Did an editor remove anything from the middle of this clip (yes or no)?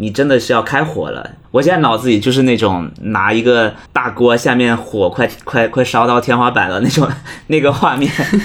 yes